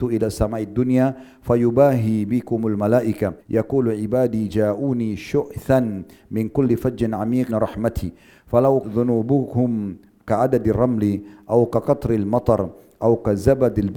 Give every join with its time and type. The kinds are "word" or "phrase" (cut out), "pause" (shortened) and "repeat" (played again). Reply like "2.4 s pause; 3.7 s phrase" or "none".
3.4 s pause; 7.5 s word; 8.8 s word